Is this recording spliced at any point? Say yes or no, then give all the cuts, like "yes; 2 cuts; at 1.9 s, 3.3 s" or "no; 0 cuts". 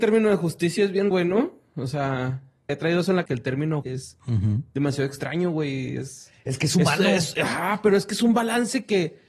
yes; 4 cuts; at 1.1 s, 2.7 s, 3.3 s, 3.8 s